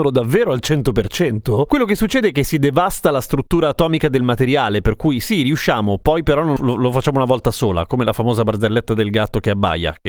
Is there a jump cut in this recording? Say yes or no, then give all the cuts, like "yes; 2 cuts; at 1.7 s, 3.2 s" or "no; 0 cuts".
yes; 1 cut; at 6.6 s